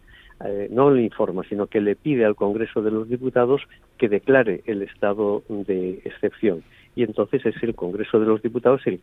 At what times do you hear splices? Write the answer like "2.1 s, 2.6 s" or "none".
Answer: none